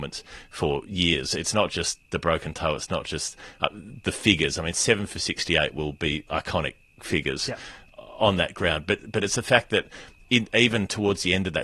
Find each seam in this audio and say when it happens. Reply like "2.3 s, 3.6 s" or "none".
none